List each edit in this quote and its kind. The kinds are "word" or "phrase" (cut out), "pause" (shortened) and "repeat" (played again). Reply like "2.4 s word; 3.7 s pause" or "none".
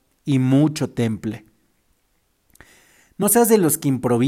none